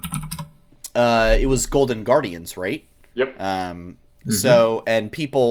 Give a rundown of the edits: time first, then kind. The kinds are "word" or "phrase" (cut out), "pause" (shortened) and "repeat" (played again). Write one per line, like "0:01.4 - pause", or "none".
none